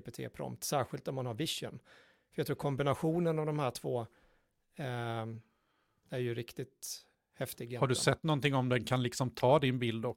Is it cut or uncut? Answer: uncut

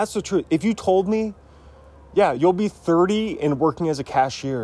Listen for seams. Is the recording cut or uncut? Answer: uncut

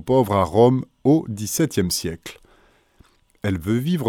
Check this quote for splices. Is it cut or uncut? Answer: uncut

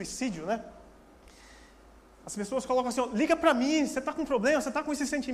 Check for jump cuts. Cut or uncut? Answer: uncut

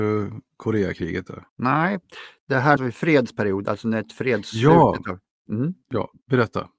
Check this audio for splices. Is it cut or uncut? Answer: cut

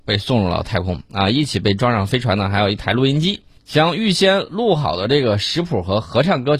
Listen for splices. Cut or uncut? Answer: cut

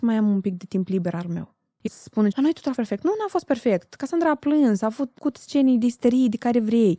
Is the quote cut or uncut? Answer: cut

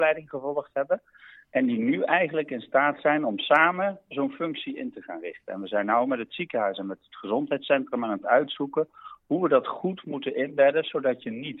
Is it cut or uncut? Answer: uncut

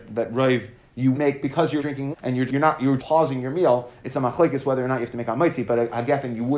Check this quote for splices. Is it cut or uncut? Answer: cut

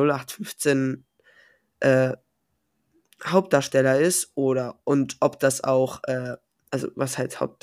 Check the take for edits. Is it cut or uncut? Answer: uncut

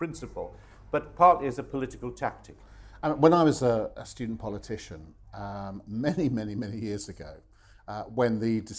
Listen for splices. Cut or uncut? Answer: uncut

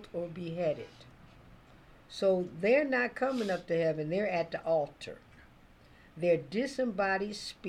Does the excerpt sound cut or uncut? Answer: uncut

